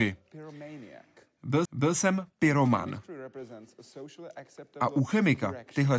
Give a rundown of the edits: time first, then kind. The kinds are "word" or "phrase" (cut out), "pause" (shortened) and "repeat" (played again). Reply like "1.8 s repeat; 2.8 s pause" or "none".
1.6 s repeat

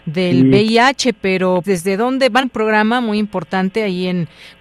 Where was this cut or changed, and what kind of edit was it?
1.6 s word; 2.4 s phrase

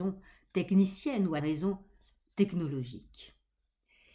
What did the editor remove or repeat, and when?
1.4 s word

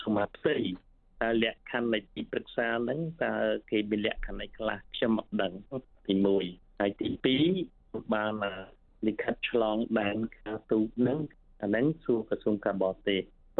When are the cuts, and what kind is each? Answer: 4.8 s pause

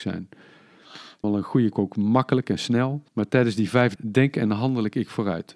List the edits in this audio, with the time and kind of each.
1.2 s word; 1.7 s phrase; 3.1 s pause; 4.0 s word

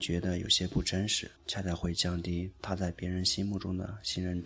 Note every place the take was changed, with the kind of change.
1.4 s pause

